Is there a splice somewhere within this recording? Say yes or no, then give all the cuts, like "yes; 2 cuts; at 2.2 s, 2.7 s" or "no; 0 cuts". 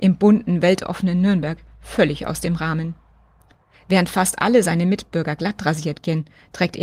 no; 0 cuts